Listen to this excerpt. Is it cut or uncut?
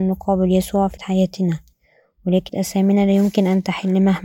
cut